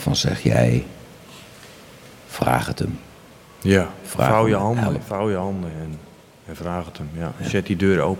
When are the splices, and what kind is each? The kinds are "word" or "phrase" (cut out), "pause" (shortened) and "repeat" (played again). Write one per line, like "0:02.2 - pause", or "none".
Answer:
0:02.1 - pause